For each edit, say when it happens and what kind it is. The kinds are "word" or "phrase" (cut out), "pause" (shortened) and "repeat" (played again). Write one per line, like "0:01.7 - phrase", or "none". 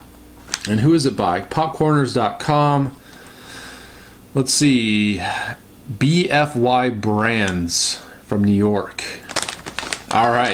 none